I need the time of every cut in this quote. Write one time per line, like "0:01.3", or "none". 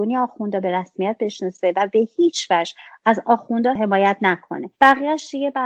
0:04.7